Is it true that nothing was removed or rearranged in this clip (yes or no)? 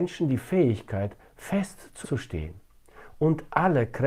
no